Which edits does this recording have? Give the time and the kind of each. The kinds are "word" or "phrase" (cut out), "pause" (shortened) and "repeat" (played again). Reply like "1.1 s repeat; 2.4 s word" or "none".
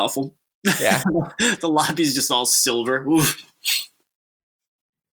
none